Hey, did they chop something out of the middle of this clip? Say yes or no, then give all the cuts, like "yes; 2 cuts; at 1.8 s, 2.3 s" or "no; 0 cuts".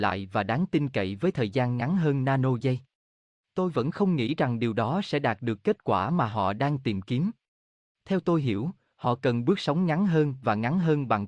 no; 0 cuts